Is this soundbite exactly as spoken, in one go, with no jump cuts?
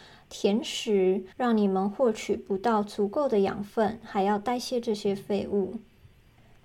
no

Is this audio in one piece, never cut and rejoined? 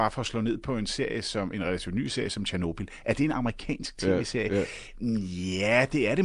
yes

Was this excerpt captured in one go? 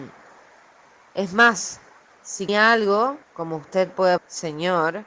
no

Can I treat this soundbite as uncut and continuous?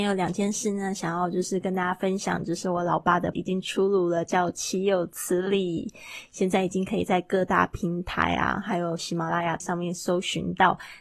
no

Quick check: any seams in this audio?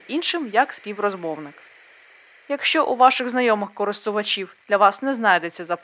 yes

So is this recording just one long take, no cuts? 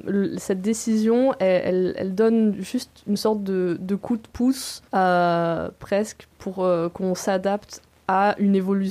no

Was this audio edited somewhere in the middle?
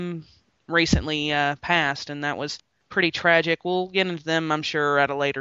no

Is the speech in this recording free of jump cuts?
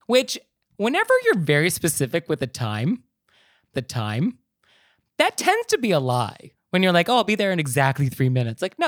no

